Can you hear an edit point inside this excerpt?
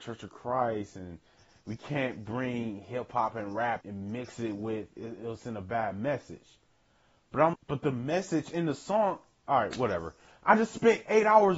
yes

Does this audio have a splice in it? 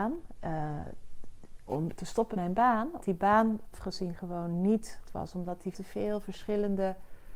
yes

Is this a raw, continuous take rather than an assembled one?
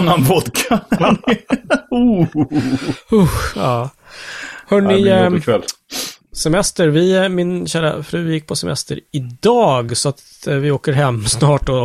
yes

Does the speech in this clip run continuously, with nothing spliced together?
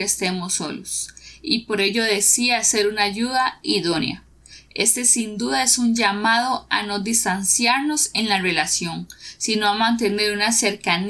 yes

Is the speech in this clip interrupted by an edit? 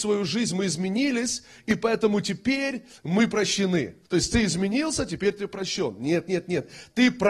yes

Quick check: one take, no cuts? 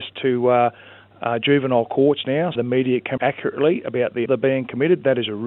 no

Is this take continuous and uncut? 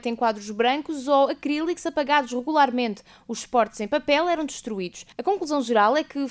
yes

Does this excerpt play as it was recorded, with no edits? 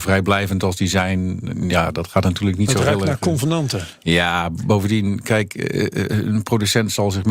yes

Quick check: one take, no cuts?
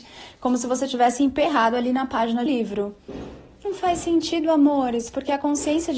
no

